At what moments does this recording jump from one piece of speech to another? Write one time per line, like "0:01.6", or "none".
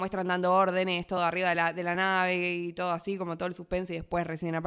none